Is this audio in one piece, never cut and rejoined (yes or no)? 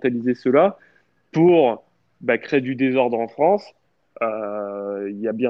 yes